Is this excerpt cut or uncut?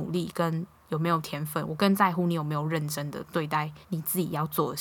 cut